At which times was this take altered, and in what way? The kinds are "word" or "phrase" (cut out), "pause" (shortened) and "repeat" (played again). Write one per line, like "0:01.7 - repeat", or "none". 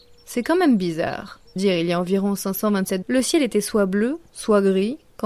0:01.6 - phrase
0:03.0 - word